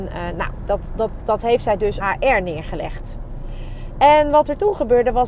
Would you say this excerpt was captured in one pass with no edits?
no; 1 cut; at 2.0 s

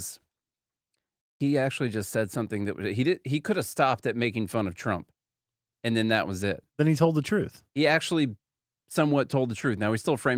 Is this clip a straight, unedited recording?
yes; 0 cuts

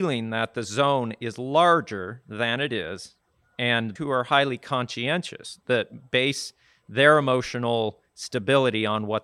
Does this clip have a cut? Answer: yes; 1 cut; at 4.0 s

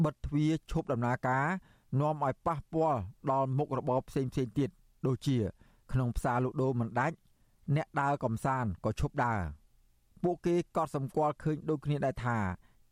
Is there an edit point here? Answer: no; 0 cuts

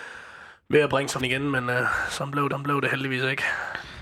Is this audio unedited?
no; 2 cuts; at 1.2 s, 2.5 s

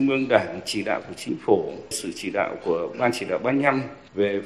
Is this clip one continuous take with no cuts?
yes; 0 cuts

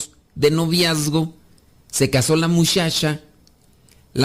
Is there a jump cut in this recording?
no; 0 cuts

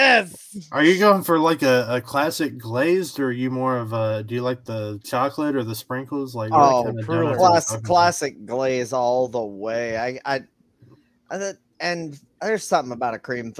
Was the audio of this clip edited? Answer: no; 0 cuts

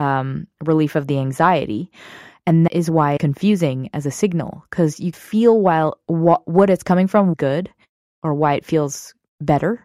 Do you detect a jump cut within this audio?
yes; 4 cuts; at 2.7 s, 3.2 s, 5.1 s, 7.3 s

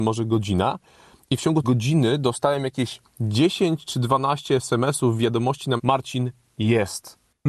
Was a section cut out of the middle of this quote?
yes; 2 cuts; at 1.6 s, 5.8 s

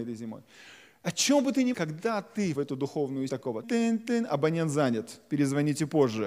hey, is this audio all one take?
no; 4 cuts; at 1.7 s, 2.5 s, 3.3 s, 3.6 s

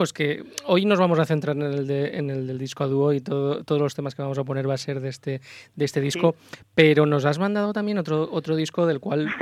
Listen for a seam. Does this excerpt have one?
no; 0 cuts

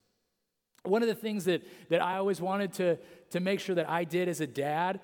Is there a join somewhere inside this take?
no; 0 cuts

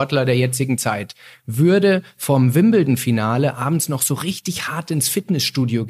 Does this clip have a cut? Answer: no; 0 cuts

